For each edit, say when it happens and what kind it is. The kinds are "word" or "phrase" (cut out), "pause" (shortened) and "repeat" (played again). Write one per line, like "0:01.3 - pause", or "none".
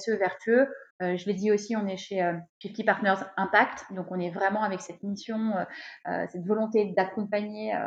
0:00.9 - pause
0:02.5 - pause